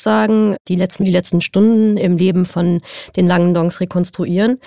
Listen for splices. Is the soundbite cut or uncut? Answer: cut